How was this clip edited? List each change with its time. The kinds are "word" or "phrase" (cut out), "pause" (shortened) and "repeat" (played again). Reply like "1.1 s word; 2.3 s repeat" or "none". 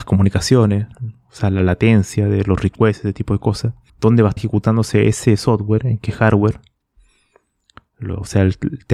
0.9 s pause; 3.9 s pause; 4.4 s word

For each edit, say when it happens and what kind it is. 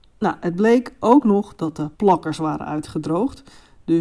1.9 s pause

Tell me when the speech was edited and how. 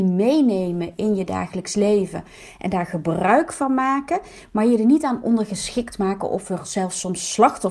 none

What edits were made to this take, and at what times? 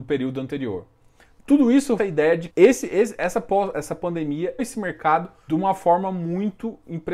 2.0 s word; 2.5 s word; 3.7 s word; 4.6 s word; 5.5 s word

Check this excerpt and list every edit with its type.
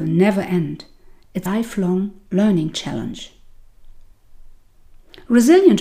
1.5 s word

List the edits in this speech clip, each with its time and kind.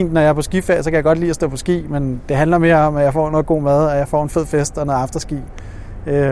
none

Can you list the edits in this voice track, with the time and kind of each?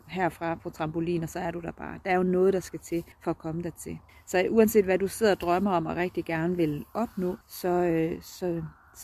3.1 s pause; 4.1 s pause; 7.4 s pause

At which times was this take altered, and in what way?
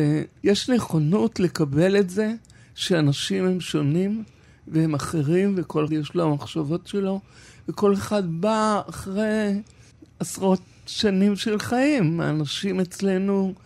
5.9 s word

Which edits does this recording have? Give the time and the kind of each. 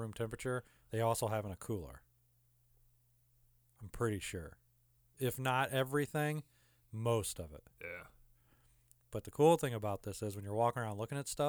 none

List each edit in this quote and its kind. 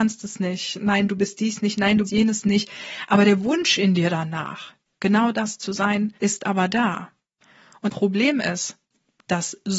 2.1 s word; 6.2 s pause; 7.9 s word

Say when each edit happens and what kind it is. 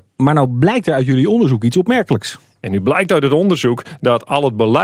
none

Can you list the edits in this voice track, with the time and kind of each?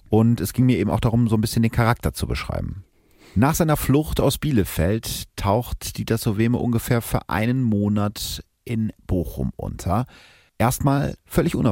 none

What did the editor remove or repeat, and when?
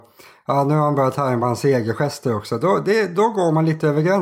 none

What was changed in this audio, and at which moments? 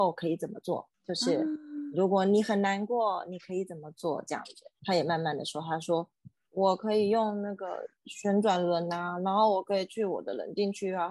none

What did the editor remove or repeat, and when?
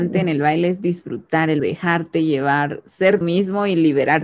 1.6 s word; 3.2 s word

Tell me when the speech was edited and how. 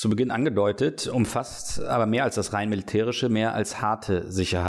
none

